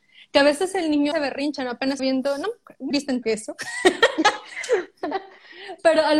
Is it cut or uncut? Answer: cut